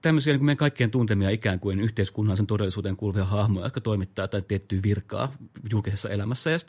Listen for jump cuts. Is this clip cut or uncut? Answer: uncut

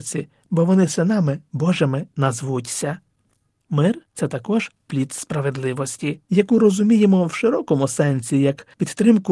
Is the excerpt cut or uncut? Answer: uncut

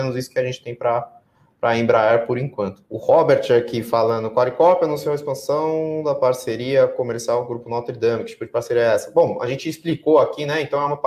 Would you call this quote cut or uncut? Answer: cut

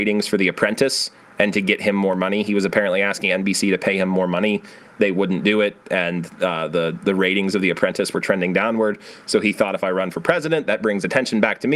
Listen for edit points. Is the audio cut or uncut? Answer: uncut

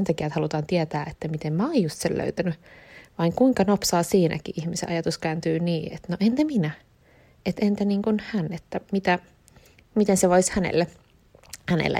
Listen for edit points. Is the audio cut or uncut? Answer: uncut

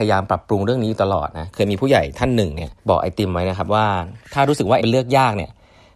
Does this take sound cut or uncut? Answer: cut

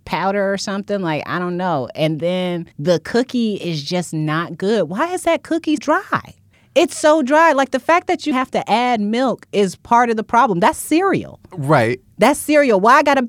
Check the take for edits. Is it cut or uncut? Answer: cut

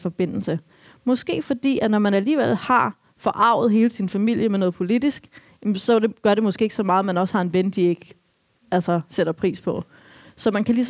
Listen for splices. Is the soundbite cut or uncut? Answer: uncut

